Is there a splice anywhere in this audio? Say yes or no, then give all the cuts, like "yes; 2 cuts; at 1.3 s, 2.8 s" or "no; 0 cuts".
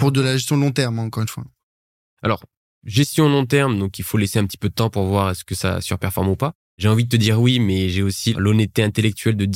no; 0 cuts